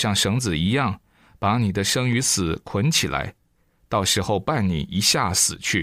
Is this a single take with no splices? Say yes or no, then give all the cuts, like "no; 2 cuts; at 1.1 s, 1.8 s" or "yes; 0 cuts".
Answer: yes; 0 cuts